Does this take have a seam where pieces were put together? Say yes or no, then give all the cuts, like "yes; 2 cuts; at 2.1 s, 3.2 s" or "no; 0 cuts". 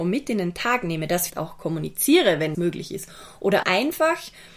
yes; 3 cuts; at 1.3 s, 2.5 s, 3.6 s